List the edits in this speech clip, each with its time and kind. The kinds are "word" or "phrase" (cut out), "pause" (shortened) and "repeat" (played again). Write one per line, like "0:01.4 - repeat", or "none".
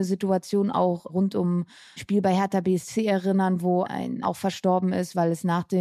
0:01.1 - word
0:02.0 - word
0:03.8 - word
0:04.2 - phrase